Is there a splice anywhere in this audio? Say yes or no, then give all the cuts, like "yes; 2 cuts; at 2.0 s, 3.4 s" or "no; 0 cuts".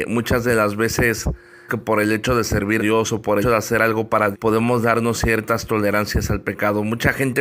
yes; 4 cuts; at 1.7 s, 2.8 s, 3.4 s, 4.3 s